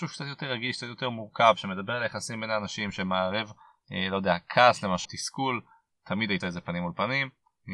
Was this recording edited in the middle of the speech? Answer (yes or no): yes